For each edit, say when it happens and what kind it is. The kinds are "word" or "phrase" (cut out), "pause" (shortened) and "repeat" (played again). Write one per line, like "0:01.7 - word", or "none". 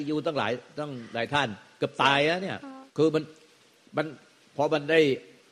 0:02.9 - pause